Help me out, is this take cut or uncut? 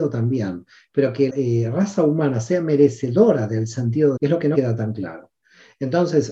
cut